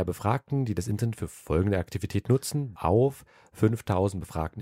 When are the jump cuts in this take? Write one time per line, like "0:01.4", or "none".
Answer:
0:02.7